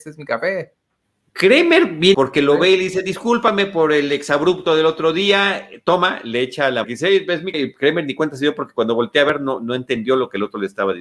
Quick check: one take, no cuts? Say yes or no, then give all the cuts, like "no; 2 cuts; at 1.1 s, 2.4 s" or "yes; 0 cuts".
no; 3 cuts; at 2.1 s, 6.8 s, 7.5 s